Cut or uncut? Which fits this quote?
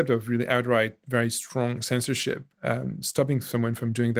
cut